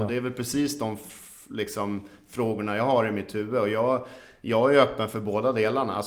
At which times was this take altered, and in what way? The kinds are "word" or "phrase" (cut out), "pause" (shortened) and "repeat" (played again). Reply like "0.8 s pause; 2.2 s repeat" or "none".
none